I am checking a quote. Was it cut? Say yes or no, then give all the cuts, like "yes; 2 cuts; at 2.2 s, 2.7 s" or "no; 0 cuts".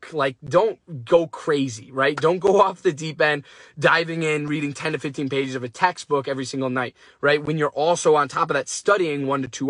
no; 0 cuts